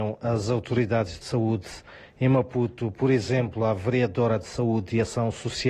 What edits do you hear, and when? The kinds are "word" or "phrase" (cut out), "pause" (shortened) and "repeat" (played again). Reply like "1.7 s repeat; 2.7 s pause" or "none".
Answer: 1.2 s word